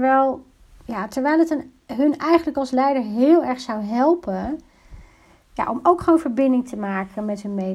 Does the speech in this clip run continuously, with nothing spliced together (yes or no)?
yes